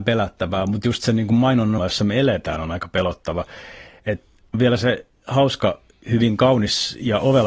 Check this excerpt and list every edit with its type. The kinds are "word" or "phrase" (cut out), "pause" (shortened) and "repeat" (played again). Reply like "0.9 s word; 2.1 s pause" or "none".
1.8 s word; 4.5 s word

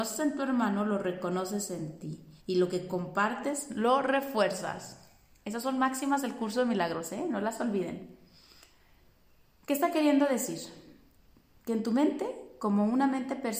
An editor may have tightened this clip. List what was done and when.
2.4 s pause

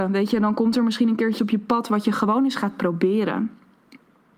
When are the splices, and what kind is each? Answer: 1.4 s word

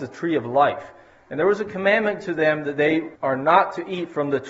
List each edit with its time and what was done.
2.2 s word; 3.2 s pause

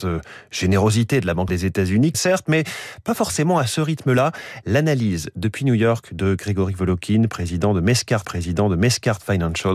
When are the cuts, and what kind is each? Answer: 1.5 s word; 2.1 s phrase; 8.2 s repeat

